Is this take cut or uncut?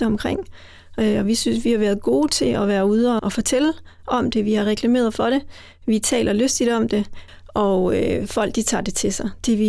cut